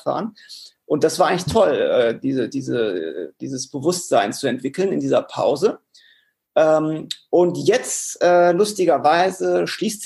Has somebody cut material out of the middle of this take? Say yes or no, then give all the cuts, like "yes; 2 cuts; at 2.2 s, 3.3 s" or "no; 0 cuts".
no; 0 cuts